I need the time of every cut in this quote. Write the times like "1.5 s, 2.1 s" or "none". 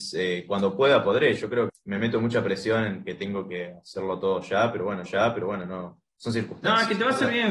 1.7 s, 5.1 s

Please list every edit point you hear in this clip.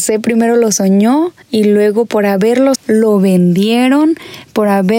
1.4 s, 2.8 s

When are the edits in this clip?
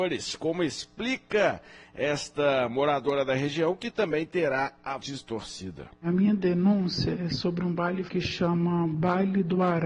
5.0 s, 5.9 s, 8.1 s

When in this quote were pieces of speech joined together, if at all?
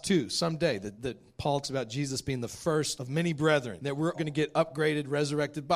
1.0 s, 1.6 s, 3.0 s, 3.8 s, 4.1 s

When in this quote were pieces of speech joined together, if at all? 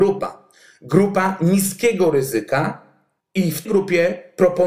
3.2 s, 3.6 s

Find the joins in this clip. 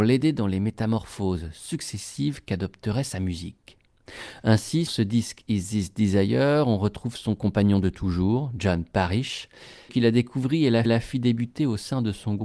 4.9 s, 9.9 s, 10.8 s

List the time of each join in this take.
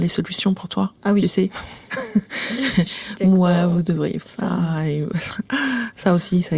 1.0 s, 4.2 s

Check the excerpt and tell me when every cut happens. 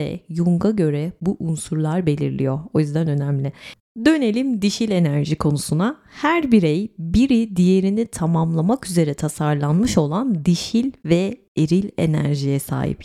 none

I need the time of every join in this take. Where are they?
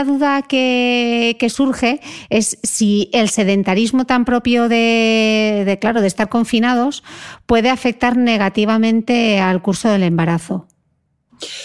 none

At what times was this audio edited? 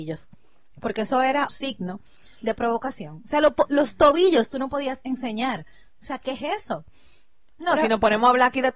1.5 s

